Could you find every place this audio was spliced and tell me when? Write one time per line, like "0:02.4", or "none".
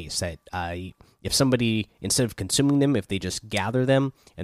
none

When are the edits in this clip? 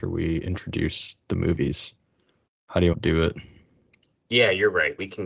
0:02.9

